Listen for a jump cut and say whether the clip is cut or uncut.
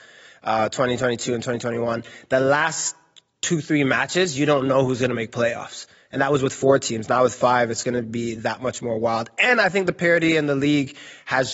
uncut